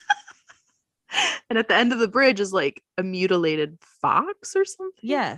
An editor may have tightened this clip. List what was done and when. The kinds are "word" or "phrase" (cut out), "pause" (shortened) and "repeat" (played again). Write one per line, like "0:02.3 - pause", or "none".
none